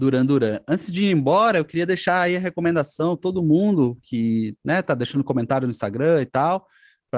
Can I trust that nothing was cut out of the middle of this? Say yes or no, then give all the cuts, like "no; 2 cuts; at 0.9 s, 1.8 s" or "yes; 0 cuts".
yes; 0 cuts